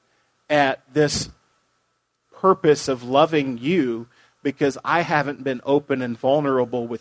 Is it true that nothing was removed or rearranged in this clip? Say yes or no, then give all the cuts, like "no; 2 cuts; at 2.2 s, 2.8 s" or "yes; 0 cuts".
yes; 0 cuts